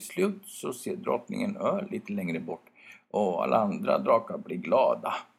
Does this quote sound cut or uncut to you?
uncut